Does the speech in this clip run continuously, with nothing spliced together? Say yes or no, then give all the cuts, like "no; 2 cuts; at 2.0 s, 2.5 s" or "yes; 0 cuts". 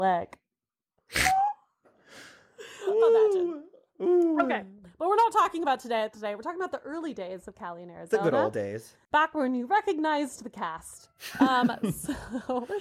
no; 1 cut; at 6.1 s